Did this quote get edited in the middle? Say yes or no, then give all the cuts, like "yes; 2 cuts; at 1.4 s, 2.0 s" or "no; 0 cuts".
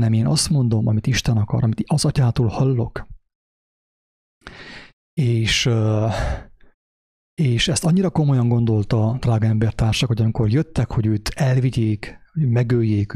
no; 0 cuts